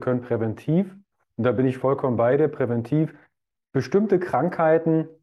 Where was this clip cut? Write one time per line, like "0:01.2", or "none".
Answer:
none